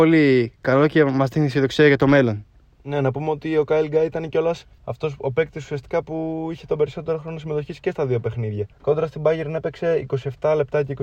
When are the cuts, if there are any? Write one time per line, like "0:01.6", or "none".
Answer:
0:04.8
0:08.7